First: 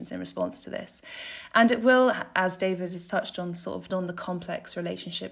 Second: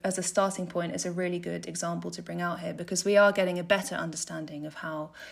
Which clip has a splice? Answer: first; 1 cut; at 3.9 s

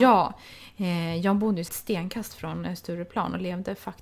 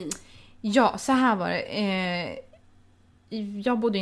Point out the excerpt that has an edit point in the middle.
first; 1 cut; at 1.7 s

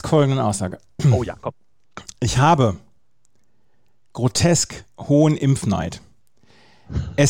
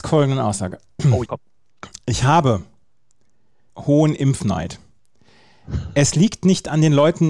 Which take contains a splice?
second; 2 cuts; at 1.3 s, 3.7 s

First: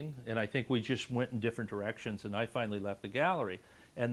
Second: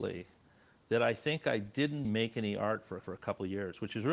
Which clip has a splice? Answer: second; 2 cuts; at 2.0 s, 3.0 s

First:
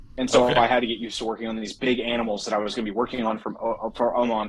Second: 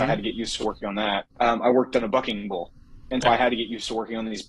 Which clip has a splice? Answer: second; 2 cuts; at 1.3 s, 3.2 s

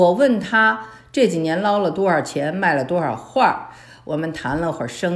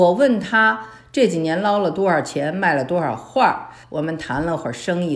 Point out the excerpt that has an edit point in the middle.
second; 1 cut; at 3.8 s

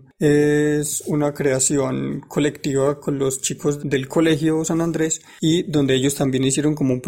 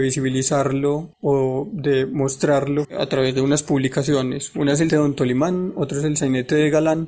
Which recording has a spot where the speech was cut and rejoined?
second; 3 cuts; at 1.1 s, 2.8 s, 4.9 s

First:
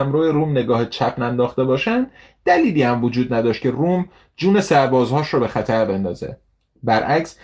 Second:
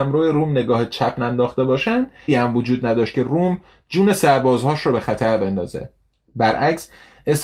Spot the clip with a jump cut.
second; 1 cut; at 2.3 s

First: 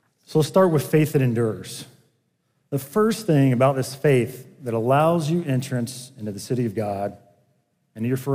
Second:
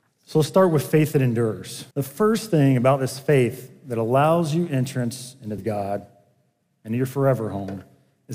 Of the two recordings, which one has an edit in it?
second; 2 cuts; at 1.9 s, 5.6 s

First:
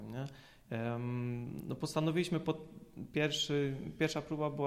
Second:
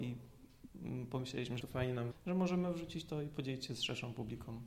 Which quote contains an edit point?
second; 2 cuts; at 1.6 s, 2.1 s

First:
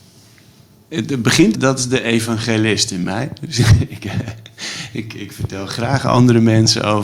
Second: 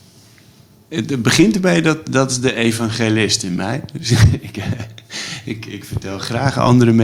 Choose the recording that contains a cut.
first; 1 cut; at 1.5 s

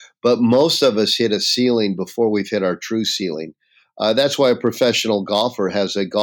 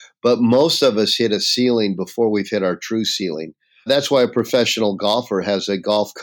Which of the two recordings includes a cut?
second; 1 cut; at 3.9 s

